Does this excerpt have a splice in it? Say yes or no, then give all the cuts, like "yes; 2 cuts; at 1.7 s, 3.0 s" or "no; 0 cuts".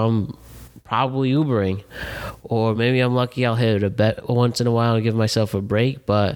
no; 0 cuts